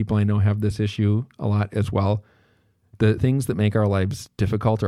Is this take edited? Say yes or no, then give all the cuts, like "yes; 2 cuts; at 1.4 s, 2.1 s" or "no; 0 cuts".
yes; 1 cut; at 3.2 s